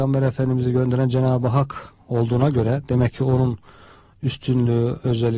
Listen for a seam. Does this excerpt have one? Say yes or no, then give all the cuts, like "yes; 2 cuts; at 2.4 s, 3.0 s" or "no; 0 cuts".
no; 0 cuts